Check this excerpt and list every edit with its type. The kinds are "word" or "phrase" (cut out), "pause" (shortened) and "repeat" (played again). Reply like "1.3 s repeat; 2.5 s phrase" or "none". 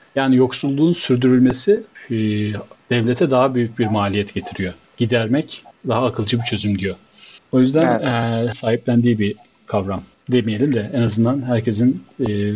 8.5 s word